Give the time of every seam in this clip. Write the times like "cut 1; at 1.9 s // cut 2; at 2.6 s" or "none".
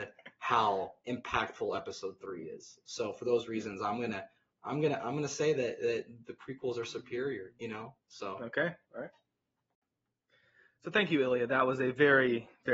cut 1; at 8.8 s